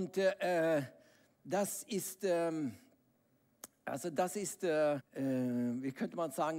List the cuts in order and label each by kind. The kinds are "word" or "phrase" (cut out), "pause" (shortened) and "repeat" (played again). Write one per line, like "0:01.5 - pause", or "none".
0:05.0 - word